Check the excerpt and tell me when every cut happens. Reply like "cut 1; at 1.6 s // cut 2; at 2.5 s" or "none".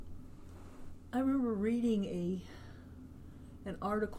none